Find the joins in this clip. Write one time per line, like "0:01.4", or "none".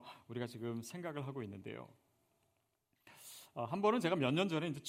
none